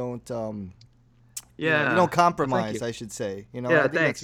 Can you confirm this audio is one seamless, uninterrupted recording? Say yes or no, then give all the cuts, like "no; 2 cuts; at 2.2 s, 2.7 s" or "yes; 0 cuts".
yes; 0 cuts